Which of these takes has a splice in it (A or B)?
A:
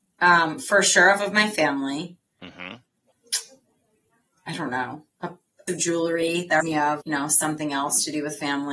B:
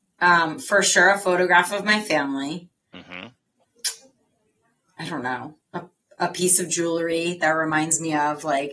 A